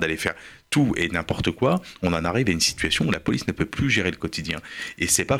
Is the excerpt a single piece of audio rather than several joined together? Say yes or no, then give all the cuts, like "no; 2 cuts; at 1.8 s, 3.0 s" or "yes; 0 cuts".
yes; 0 cuts